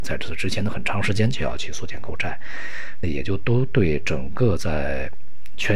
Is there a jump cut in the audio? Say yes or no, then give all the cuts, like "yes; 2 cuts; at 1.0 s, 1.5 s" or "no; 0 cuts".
yes; 1 cut; at 3.0 s